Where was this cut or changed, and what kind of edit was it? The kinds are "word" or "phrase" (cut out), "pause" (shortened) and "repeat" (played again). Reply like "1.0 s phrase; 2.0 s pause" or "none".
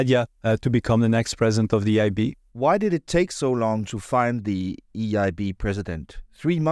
none